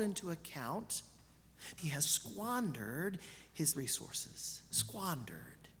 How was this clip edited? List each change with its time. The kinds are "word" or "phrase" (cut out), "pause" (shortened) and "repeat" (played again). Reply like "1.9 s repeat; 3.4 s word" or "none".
1.8 s word; 3.7 s word